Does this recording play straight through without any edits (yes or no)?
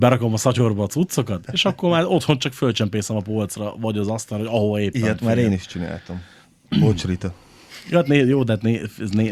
yes